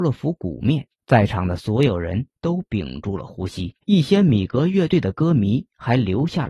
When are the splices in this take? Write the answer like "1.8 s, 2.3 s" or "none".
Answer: 0.9 s, 3.8 s